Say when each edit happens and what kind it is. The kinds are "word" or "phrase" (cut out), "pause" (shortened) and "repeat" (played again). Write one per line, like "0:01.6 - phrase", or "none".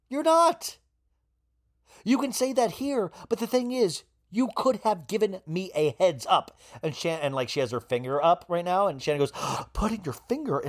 none